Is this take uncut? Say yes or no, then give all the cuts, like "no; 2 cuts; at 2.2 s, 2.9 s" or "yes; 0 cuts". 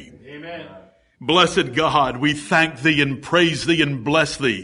yes; 0 cuts